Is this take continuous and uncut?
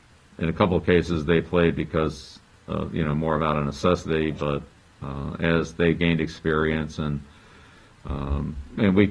yes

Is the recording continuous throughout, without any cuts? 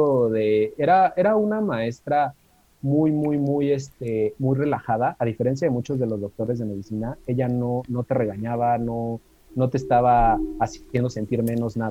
yes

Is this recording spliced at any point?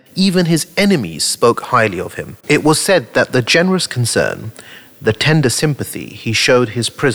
yes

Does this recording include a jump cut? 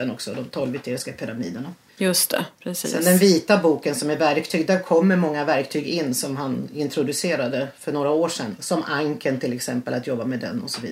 yes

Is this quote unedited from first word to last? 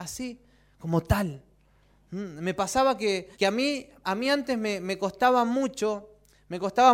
no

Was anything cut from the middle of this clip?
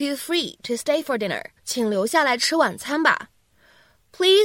yes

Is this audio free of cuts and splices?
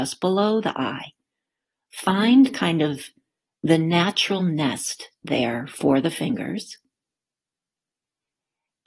yes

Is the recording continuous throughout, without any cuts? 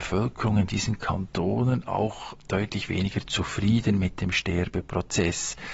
yes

